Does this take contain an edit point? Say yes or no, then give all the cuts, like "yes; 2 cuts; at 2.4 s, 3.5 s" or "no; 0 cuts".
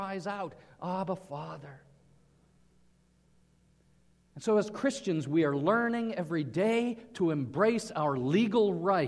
no; 0 cuts